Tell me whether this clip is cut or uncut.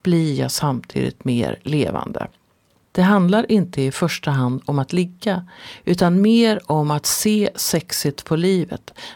uncut